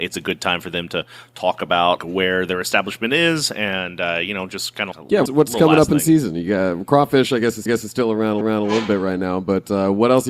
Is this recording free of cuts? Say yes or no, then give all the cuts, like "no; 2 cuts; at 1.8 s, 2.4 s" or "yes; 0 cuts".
no; 5 cuts; at 2.0 s, 4.9 s, 5.3 s, 7.7 s, 8.4 s